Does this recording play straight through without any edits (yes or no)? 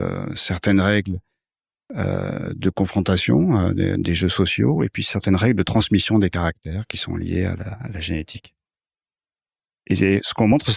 yes